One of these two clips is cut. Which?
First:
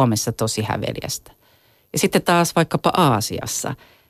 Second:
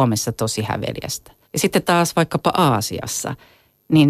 second; 1 cut; at 1.4 s

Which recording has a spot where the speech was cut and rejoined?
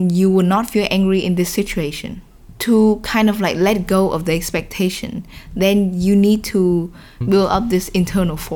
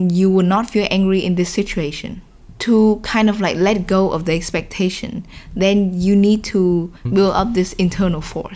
second; 1 cut; at 7.0 s

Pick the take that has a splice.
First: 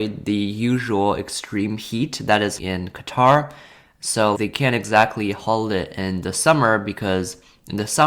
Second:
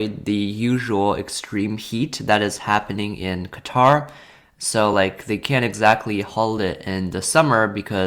first; 2 cuts; at 2.6 s, 4.3 s

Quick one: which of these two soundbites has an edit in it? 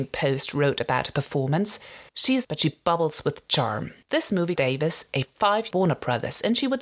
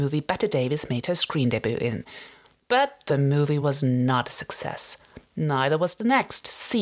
first; 5 cuts; at 2.1 s, 2.4 s, 4.0 s, 4.6 s, 5.7 s

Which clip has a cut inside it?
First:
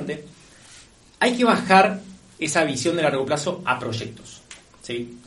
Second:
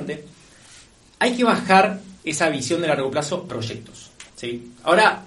second; 3 cuts; at 2.2 s, 3.5 s, 4.3 s

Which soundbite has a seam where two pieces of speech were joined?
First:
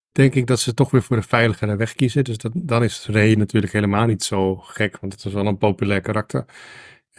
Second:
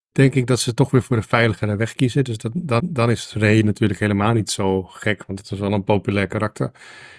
second; 1 cut; at 2.8 s

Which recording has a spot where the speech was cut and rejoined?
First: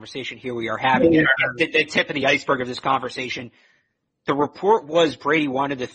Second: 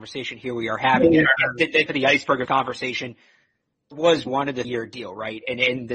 second; 5 cuts; at 1.9 s, 2.4 s, 3.9 s, 4.3 s, 4.6 s

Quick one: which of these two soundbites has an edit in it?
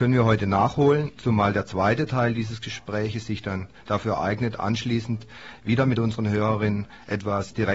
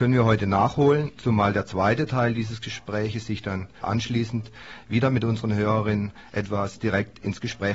second; 1 cut; at 3.8 s

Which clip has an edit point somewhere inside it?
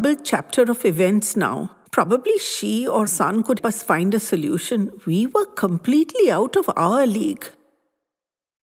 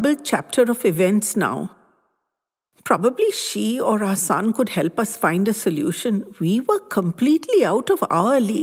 first; 3 cuts; at 1.9 s, 3.1 s, 3.6 s

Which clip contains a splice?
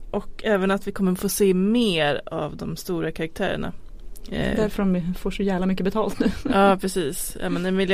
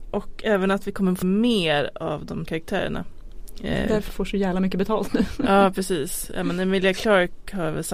second; 3 cuts; at 1.2 s, 2.4 s, 4.1 s

